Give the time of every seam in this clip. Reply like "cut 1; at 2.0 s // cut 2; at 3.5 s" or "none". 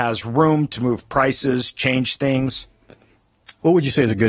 none